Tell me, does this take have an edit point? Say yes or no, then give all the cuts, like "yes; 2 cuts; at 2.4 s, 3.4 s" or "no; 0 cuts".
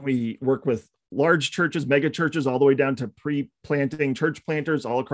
no; 0 cuts